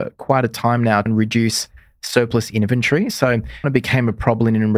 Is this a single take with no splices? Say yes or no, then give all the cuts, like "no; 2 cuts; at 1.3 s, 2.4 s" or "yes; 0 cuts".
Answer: no; 2 cuts; at 1.1 s, 3.6 s